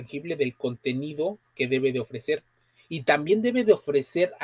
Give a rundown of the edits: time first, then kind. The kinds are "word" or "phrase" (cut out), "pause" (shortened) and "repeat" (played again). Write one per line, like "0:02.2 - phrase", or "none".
none

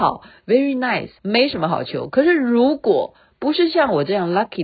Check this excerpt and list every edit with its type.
0:01.2 - pause

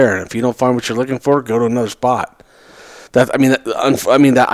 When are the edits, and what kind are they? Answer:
0:03.1 - pause

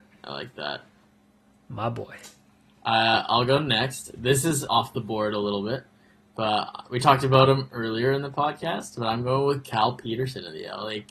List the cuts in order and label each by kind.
0:04.7 - word

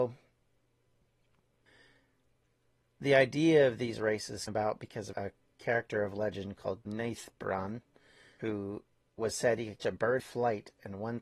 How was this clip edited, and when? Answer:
0:04.5 - word
0:05.1 - word
0:06.8 - word
0:08.4 - word
0:09.8 - word
0:10.2 - word

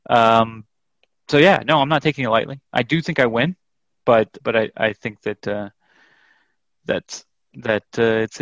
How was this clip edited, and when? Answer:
0:04.4 - word

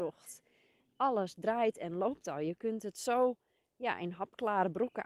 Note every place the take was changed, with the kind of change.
none

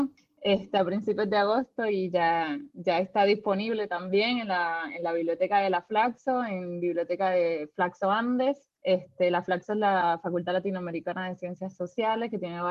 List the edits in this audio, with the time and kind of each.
0:08.8 - pause

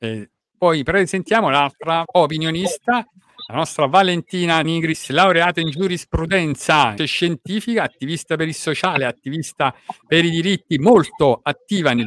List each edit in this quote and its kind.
0:02.0 - word
0:04.6 - word
0:07.0 - word

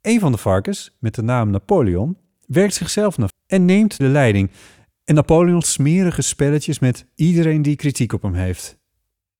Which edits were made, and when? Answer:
0:03.3 - word
0:04.0 - phrase
0:05.6 - word

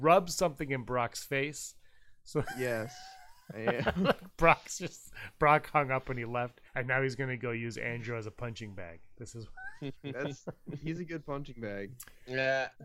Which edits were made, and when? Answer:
0:06.7 - pause

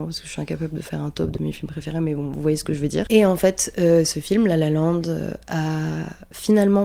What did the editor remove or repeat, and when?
none

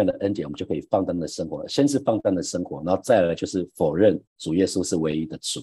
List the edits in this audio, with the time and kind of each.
0:04.3 - pause

